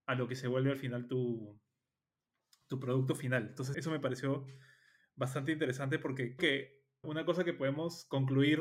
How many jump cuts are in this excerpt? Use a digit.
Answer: 3